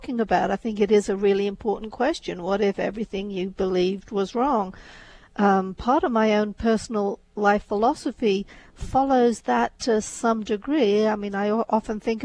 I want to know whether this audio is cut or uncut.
uncut